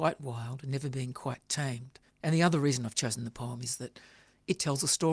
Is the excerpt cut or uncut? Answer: cut